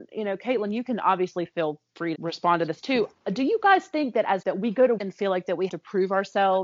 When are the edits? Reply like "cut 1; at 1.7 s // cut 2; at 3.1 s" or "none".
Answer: cut 1; at 2.1 s // cut 2; at 4.4 s // cut 3; at 5.0 s // cut 4; at 5.7 s